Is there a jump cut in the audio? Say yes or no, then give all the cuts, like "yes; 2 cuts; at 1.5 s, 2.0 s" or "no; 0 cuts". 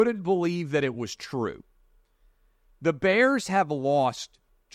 no; 0 cuts